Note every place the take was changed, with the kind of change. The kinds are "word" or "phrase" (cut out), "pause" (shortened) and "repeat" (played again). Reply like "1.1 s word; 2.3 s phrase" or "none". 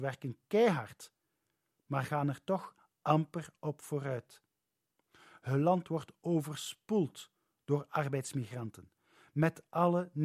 none